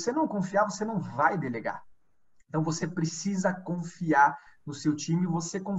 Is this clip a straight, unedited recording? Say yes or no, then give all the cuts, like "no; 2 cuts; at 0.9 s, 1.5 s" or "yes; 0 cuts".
yes; 0 cuts